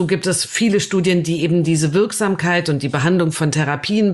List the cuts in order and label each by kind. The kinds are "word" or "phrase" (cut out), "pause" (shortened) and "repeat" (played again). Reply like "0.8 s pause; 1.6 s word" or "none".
none